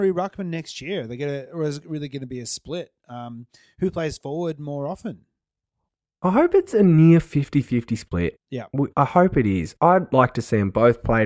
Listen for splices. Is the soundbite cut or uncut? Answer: uncut